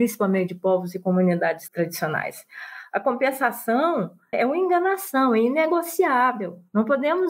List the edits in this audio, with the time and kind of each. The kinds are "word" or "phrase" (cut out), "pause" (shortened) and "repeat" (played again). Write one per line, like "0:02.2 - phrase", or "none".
0:01.7 - word
0:04.3 - word